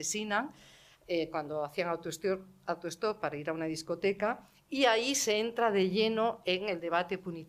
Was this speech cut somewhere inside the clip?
no; 0 cuts

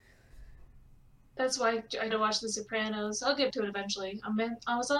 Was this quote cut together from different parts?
yes; 2 cuts; at 2.1 s, 3.5 s

